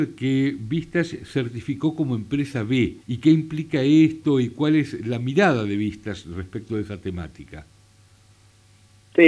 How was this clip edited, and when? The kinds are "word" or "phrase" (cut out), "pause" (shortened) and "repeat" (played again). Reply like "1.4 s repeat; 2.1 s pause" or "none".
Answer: 3.0 s pause